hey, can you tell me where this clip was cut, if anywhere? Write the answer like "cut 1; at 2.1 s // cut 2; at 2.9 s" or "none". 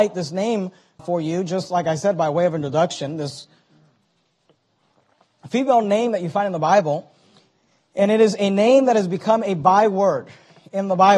cut 1; at 1.0 s